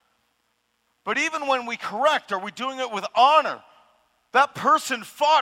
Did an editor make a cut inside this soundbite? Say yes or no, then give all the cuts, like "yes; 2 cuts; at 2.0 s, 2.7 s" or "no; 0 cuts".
no; 0 cuts